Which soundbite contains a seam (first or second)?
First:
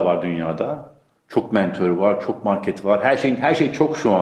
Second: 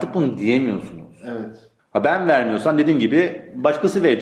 second